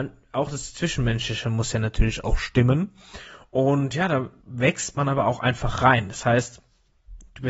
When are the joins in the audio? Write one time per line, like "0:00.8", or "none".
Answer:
0:04.4